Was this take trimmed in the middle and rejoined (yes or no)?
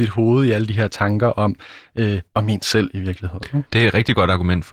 yes